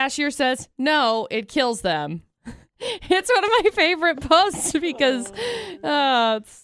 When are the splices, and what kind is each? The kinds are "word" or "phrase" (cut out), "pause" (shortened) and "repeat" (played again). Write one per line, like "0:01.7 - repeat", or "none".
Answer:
0:02.7 - word

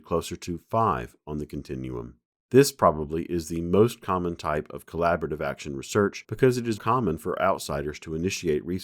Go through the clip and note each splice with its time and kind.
0:06.8 - word

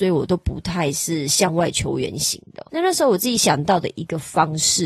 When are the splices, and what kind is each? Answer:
0:02.7 - pause

